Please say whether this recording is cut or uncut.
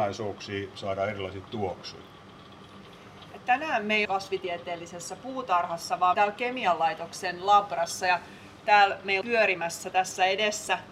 cut